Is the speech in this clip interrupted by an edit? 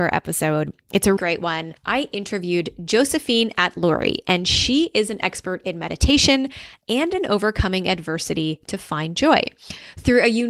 yes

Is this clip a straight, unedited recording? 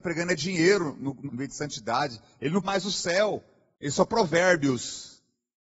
no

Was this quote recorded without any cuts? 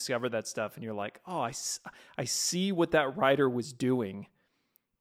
yes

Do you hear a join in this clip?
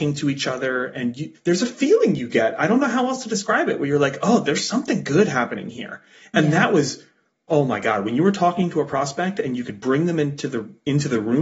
no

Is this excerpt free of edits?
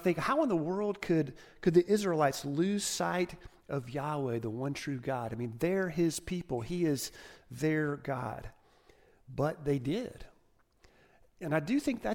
yes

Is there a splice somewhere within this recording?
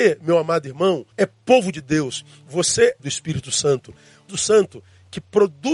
yes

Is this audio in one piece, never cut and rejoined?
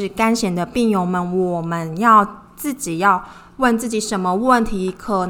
yes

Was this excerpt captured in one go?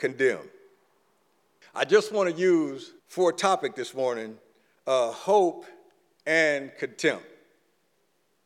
no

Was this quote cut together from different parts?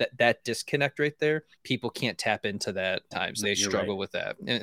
yes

